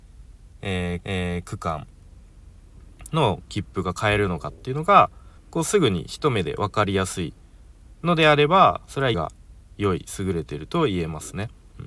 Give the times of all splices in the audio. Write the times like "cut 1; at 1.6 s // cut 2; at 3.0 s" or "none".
cut 1; at 1.0 s // cut 2; at 5.4 s // cut 3; at 9.1 s